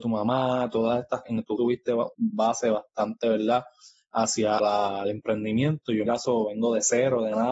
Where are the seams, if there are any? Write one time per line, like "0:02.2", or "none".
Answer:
0:01.3
0:01.6
0:02.1
0:04.6
0:06.1